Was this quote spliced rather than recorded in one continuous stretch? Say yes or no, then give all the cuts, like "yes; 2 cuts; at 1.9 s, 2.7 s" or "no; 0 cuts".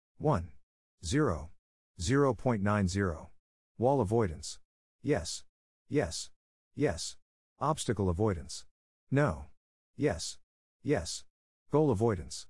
no; 0 cuts